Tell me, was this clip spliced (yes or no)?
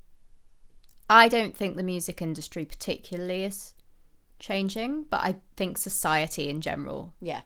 no